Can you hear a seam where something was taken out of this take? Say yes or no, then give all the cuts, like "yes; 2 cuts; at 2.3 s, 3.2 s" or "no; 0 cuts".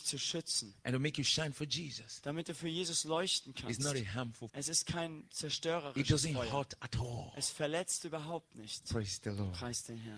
yes; 1 cut; at 4.5 s